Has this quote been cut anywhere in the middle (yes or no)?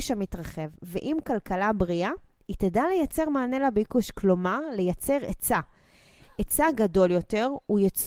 no